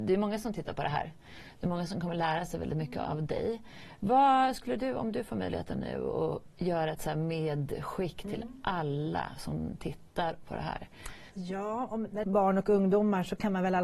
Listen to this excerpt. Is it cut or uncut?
cut